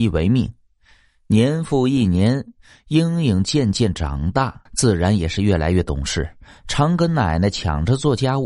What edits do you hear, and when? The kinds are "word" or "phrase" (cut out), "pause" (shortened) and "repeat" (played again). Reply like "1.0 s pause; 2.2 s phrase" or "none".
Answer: 4.7 s pause